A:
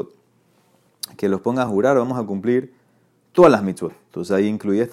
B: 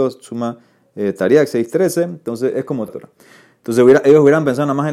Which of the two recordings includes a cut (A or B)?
B